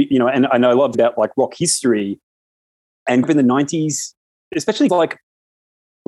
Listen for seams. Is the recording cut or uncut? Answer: cut